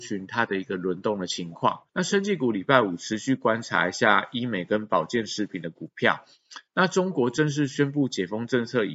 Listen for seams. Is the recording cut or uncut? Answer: cut